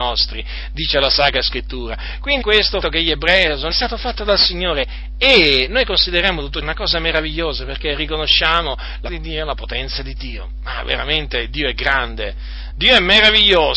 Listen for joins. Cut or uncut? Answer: cut